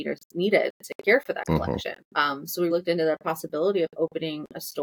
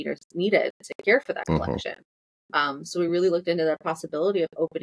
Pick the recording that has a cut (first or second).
first